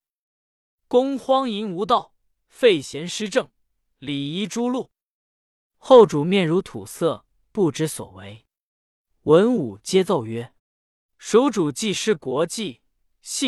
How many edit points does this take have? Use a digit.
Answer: 1